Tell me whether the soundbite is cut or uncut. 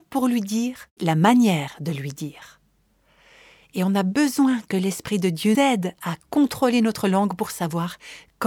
cut